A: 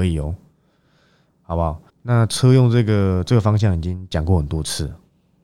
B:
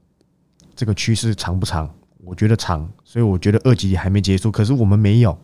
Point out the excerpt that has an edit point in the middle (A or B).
A